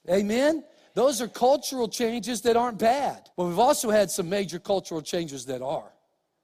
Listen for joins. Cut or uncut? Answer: cut